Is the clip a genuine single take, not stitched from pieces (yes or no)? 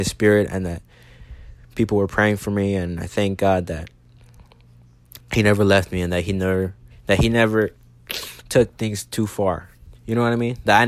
no